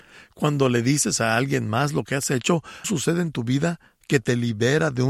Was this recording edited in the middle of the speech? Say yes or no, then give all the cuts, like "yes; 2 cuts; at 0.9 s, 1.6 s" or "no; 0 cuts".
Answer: yes; 1 cut; at 2.8 s